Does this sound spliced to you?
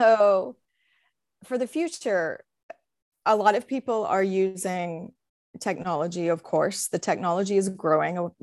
no; 0 cuts

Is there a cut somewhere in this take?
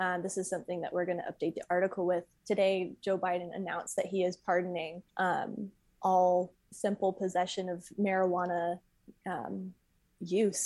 yes; 2 cuts; at 2.4 s, 5.1 s

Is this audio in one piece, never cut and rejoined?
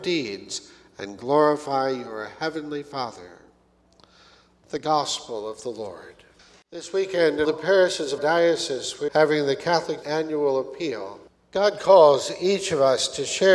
no; 4 cuts; at 7.4 s, 8.2 s, 9.1 s, 10.0 s

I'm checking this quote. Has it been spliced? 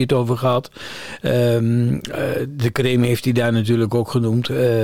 no; 0 cuts

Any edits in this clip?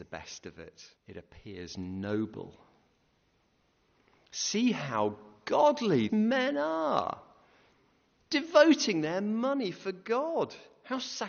yes; 2 cuts; at 1.0 s, 6.1 s

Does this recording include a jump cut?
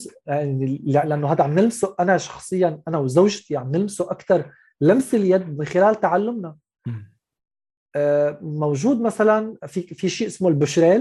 no; 0 cuts

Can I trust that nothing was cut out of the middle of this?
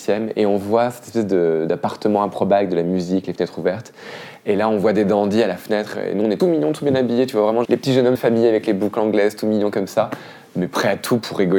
no; 3 cuts; at 6.4 s, 7.6 s, 8.2 s

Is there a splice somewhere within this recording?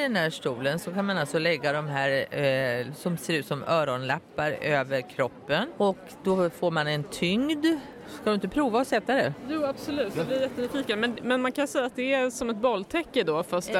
no; 0 cuts

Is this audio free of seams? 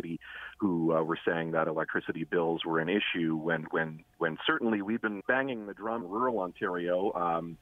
no; 2 cuts; at 5.2 s, 6.0 s

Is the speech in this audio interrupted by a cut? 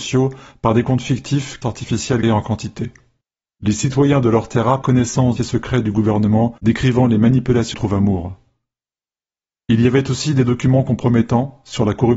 yes; 7 cuts; at 1.6 s, 2.2 s, 3.2 s, 4.8 s, 5.4 s, 6.6 s, 7.7 s

